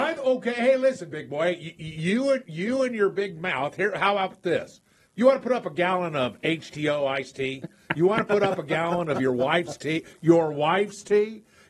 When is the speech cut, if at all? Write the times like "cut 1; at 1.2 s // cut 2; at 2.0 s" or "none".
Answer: none